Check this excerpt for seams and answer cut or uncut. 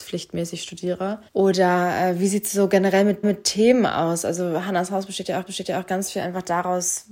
cut